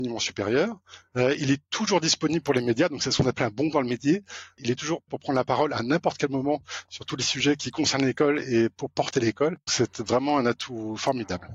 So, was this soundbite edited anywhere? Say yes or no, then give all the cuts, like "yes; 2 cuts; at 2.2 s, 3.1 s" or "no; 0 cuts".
yes; 3 cuts; at 3.7 s, 5.1 s, 9.7 s